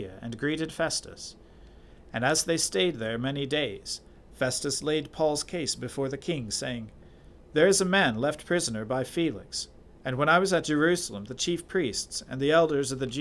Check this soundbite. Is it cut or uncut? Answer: uncut